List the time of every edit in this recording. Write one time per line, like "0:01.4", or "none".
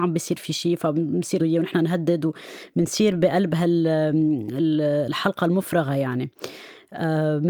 0:01.4